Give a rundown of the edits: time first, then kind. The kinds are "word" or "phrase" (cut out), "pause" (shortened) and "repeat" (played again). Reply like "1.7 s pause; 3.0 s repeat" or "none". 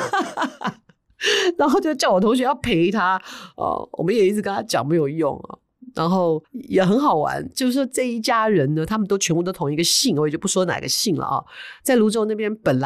6.4 s pause